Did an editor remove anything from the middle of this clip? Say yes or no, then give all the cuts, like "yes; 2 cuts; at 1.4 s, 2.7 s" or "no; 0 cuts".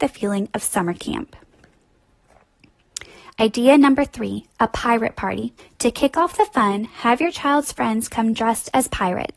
yes; 1 cut; at 5.6 s